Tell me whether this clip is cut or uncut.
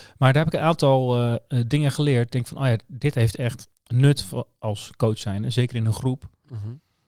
cut